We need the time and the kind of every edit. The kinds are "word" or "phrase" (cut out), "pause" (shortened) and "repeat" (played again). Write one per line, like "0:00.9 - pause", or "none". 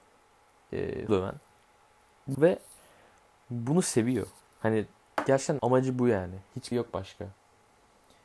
0:01.1 - word
0:02.3 - word
0:05.6 - word
0:06.7 - word

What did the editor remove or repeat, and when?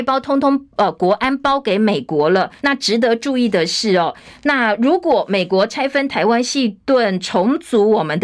0:02.6 - pause

